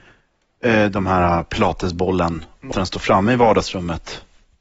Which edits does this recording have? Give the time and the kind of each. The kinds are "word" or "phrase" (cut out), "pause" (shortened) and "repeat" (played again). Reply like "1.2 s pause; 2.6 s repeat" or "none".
2.7 s word